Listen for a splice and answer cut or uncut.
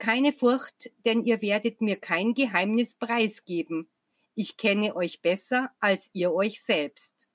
uncut